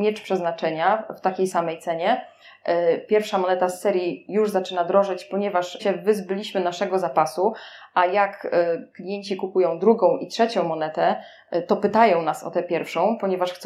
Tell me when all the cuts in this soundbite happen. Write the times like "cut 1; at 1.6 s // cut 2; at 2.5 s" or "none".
cut 1; at 5.8 s